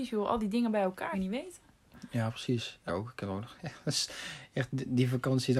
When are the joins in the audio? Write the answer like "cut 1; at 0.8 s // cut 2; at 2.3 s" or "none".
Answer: cut 1; at 1.1 s // cut 2; at 2.9 s